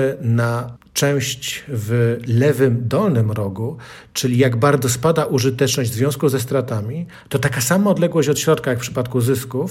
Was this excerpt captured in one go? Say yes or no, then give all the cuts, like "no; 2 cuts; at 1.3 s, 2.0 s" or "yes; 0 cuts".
yes; 0 cuts